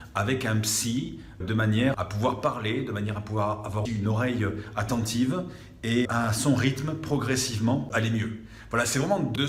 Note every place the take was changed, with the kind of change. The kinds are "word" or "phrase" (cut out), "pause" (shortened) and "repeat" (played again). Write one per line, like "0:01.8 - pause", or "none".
0:01.4 - word
0:01.9 - word
0:03.9 - word
0:06.1 - word